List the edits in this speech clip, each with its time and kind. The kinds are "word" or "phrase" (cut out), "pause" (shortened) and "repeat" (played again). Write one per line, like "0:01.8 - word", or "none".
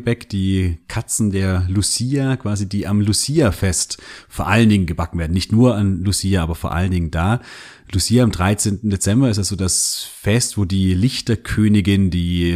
none